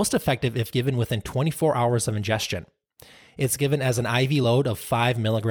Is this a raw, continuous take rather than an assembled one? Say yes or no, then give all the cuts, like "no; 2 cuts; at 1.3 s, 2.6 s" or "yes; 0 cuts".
yes; 0 cuts